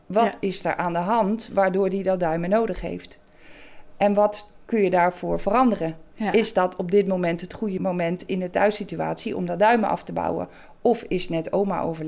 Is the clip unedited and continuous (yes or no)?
yes